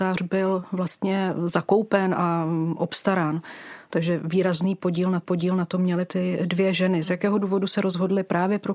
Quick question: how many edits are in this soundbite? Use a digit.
2